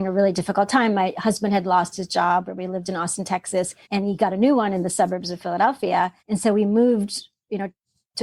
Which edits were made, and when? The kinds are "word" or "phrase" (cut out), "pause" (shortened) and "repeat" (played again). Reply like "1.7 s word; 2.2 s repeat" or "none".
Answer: 3.8 s pause; 6.2 s pause